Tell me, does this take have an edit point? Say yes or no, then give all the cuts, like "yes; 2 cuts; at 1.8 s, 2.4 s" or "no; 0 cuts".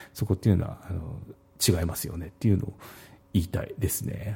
no; 0 cuts